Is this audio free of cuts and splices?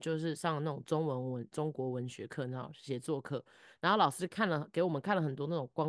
yes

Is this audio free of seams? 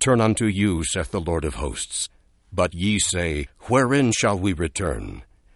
yes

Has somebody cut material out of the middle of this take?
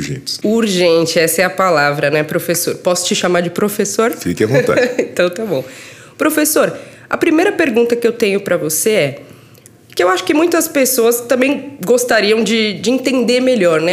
no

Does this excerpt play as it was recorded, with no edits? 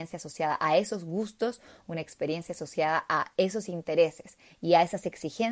yes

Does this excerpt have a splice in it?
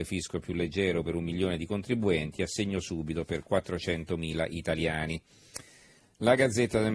no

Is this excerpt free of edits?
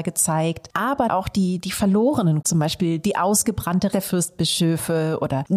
no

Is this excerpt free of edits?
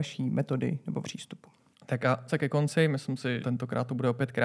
no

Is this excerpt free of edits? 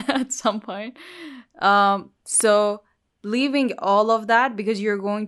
yes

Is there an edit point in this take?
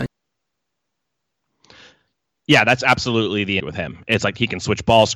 yes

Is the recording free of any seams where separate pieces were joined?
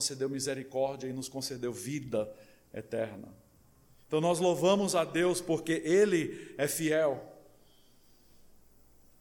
yes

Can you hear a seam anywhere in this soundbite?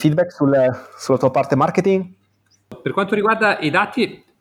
no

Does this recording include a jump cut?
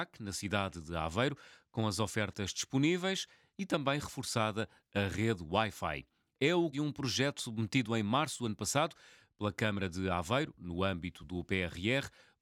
yes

